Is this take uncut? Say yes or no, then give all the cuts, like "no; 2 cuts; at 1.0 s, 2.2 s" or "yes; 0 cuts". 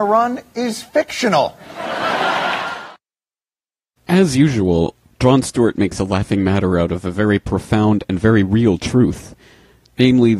yes; 0 cuts